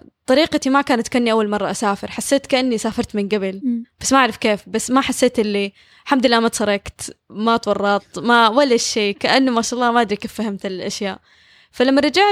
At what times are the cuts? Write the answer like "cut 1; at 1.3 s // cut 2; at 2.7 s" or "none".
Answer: none